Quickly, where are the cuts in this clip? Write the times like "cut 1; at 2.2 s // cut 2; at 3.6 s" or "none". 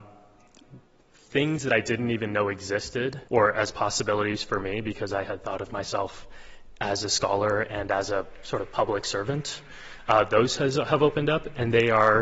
cut 1; at 3.3 s